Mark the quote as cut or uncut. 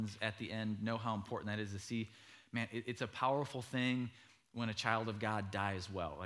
uncut